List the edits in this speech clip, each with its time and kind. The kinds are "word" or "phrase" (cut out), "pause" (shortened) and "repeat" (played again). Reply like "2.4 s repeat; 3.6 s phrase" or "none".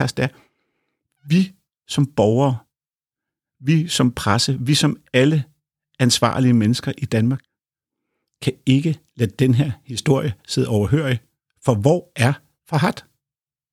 none